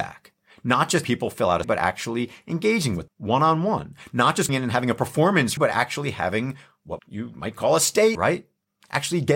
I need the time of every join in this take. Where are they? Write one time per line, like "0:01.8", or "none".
0:01.0
0:01.6
0:03.1
0:04.5
0:05.6
0:07.0
0:08.1